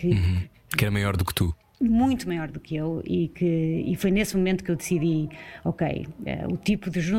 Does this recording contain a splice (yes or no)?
no